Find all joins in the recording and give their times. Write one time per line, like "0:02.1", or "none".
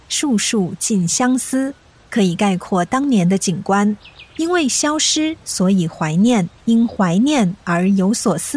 0:04.3
0:06.6